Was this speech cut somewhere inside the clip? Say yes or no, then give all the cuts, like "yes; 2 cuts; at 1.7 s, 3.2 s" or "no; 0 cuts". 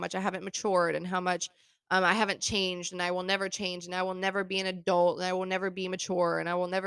no; 0 cuts